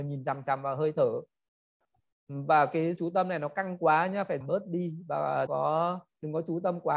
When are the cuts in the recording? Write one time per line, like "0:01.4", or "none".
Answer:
0:03.0
0:04.4
0:05.5